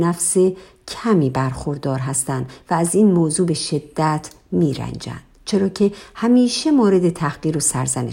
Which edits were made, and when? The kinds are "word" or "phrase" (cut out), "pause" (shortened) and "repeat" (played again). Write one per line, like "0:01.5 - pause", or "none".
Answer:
none